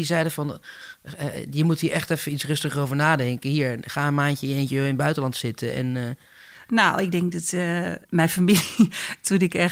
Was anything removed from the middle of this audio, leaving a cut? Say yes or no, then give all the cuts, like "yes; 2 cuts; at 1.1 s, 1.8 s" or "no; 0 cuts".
no; 0 cuts